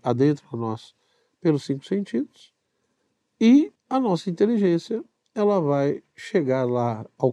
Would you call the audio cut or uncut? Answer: cut